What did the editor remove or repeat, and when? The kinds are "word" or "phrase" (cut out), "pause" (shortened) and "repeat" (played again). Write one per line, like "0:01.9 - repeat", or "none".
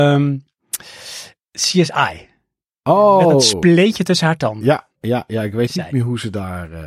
none